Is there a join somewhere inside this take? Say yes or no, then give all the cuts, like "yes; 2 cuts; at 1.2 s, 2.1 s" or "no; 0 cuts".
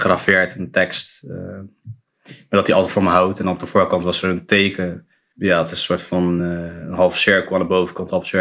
no; 0 cuts